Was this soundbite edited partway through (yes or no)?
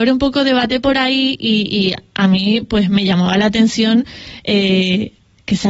no